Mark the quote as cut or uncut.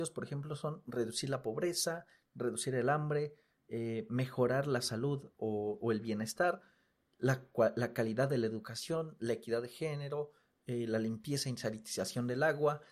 uncut